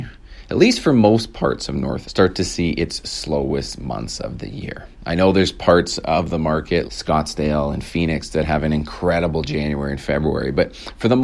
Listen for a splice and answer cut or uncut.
cut